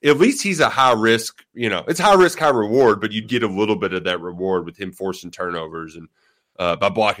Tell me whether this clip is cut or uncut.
cut